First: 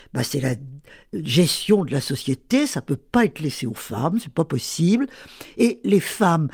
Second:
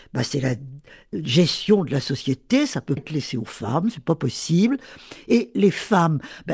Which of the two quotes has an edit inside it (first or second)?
second